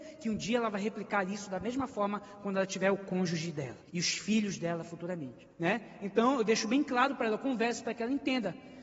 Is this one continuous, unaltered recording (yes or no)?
no